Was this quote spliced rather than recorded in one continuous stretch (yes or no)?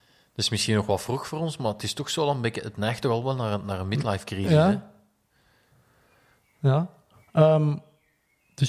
no